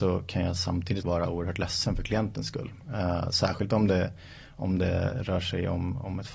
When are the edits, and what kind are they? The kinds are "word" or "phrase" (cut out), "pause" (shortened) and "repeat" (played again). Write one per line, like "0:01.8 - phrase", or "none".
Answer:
0:01.0 - word